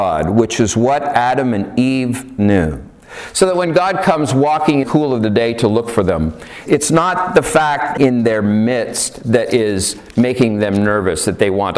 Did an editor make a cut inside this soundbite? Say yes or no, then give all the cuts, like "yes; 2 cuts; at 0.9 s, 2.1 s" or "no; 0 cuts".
yes; 3 cuts; at 4.8 s, 6.7 s, 8.0 s